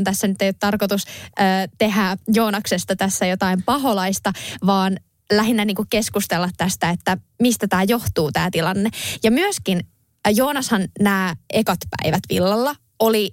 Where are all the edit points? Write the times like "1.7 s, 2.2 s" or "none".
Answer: none